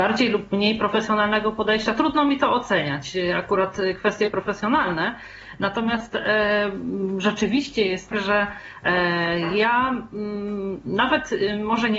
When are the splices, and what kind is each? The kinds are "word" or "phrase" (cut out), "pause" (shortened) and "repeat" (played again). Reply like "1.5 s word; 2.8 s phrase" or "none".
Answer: 8.1 s word